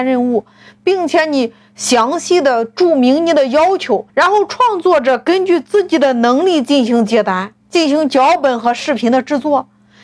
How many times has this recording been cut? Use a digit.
2